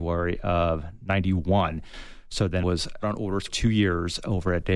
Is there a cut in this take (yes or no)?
yes